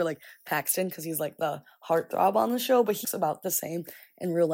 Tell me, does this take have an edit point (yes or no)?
yes